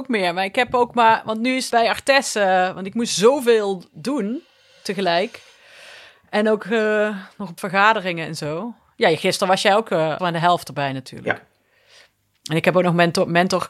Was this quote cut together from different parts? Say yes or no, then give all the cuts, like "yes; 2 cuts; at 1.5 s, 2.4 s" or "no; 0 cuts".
yes; 3 cuts; at 1.7 s, 7.6 s, 10.2 s